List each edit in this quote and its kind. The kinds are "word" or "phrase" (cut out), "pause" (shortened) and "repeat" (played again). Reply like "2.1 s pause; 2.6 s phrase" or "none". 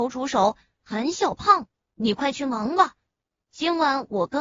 none